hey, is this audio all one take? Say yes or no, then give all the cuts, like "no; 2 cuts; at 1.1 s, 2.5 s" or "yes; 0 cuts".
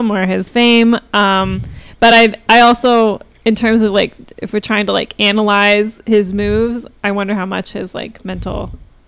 yes; 0 cuts